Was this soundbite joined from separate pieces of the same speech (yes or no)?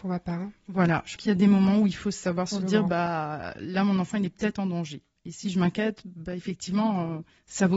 yes